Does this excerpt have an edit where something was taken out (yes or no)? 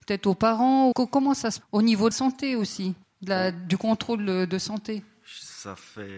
yes